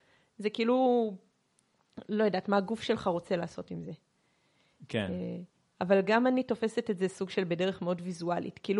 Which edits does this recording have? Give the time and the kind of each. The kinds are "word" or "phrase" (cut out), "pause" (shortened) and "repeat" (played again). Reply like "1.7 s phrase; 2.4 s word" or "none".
none